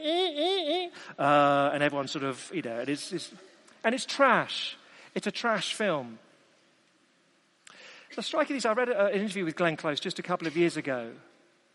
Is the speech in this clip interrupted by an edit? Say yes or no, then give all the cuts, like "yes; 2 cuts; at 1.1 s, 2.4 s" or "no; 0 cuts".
no; 0 cuts